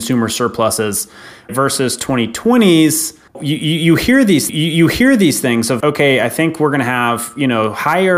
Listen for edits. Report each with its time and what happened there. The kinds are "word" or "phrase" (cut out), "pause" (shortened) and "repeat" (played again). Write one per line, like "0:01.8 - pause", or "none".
0:01.5 - word
0:03.3 - pause
0:04.5 - repeat
0:05.8 - word